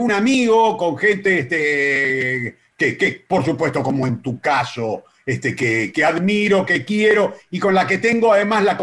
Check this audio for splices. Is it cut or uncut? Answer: uncut